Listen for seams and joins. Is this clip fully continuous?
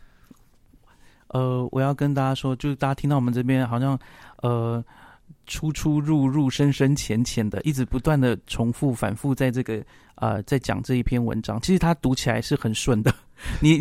yes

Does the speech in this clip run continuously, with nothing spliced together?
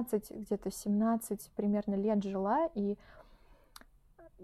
yes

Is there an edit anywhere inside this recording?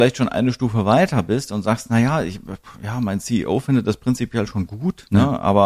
no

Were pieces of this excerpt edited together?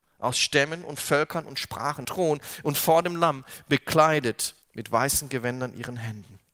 yes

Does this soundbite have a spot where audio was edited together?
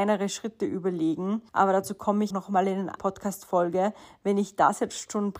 yes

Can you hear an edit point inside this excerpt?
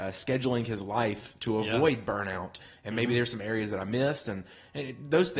no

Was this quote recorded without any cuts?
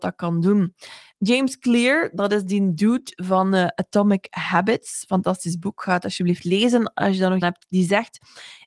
no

